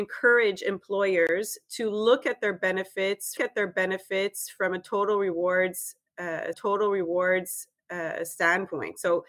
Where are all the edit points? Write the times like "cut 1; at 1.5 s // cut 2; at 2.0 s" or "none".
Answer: cut 1; at 3.4 s // cut 2; at 6.5 s